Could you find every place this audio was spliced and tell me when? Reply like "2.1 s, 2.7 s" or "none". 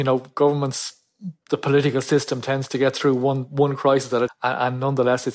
4.3 s